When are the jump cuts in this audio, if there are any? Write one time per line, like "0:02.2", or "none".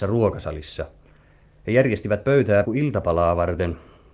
0:02.6